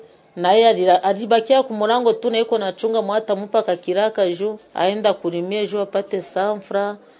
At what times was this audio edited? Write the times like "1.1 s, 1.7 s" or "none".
4.6 s